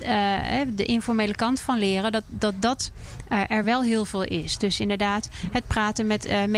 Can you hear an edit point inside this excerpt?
no; 0 cuts

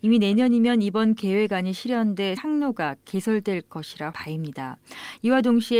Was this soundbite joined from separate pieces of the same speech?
yes; 2 cuts; at 2.4 s, 4.1 s

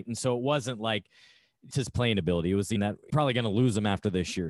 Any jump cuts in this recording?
yes; 3 cuts; at 1.7 s, 2.8 s, 3.1 s

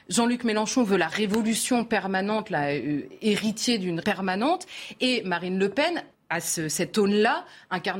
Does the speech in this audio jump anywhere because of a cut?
yes; 2 cuts; at 4.0 s, 6.1 s

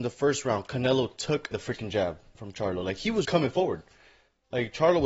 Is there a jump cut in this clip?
yes; 3 cuts; at 1.5 s, 2.3 s, 3.2 s

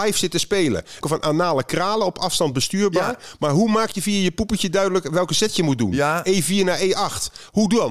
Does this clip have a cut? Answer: yes; 1 cut; at 1.0 s

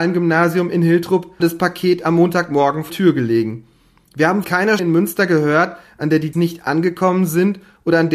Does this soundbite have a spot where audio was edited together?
yes; 5 cuts; at 1.4 s, 2.9 s, 4.4 s, 4.8 s, 6.3 s

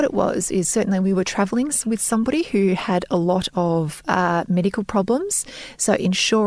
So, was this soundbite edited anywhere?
no; 0 cuts

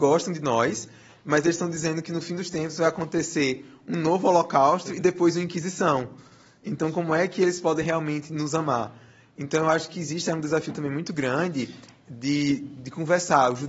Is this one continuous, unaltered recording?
yes; 0 cuts

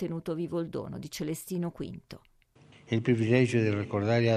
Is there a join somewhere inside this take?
no; 0 cuts

